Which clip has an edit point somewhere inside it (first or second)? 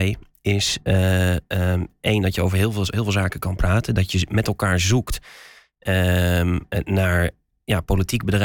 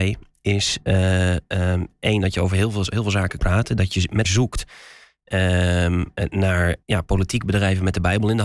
second